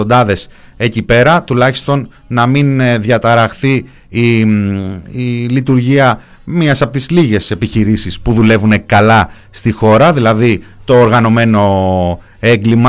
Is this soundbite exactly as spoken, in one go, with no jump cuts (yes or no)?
yes